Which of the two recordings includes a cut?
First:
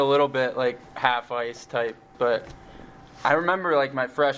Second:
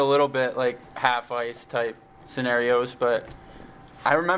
first; 1 cut; at 2.1 s

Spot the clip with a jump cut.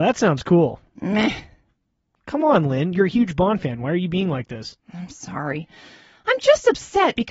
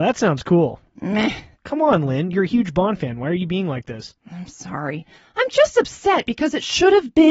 second; 2 cuts; at 1.5 s, 5.1 s

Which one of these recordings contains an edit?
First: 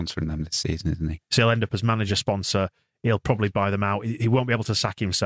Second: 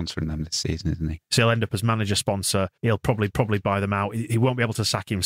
second; 2 cuts; at 2.8 s, 3.3 s

